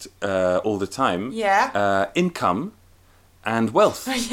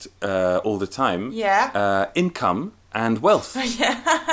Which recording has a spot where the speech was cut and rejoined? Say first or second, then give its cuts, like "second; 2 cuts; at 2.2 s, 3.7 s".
second; 1 cut; at 2.8 s